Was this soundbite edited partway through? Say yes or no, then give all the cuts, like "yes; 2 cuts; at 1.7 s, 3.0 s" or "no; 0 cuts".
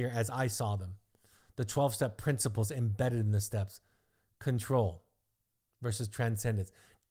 no; 0 cuts